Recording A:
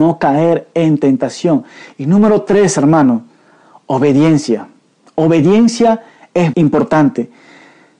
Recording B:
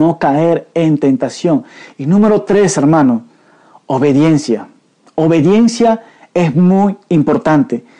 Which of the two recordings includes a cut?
A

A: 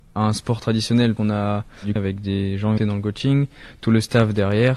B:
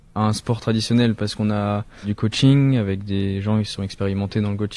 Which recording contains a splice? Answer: A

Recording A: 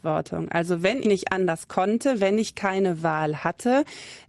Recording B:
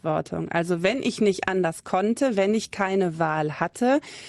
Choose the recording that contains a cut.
A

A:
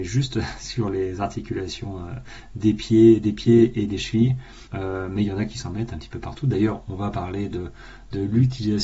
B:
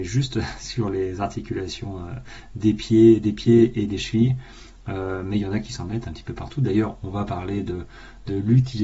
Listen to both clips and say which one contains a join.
A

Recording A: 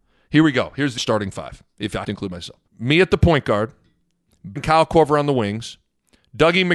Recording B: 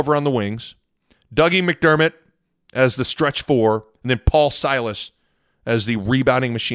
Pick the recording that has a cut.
A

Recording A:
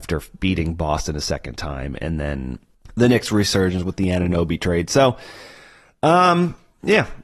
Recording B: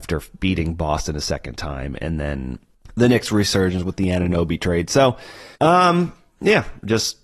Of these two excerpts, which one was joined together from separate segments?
B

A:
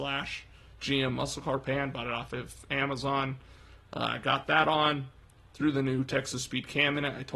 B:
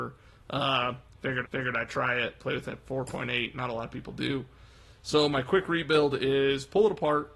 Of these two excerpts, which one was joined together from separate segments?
B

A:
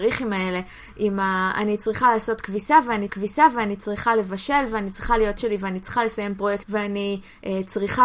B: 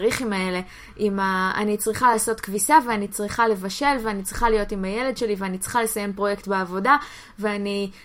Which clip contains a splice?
A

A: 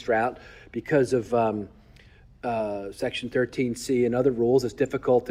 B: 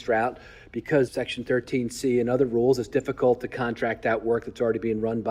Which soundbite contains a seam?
B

